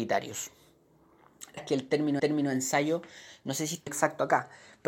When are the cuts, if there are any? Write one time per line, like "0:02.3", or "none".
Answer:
0:01.6
0:02.2
0:03.9